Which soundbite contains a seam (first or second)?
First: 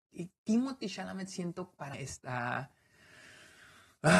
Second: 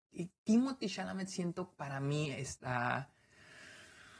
first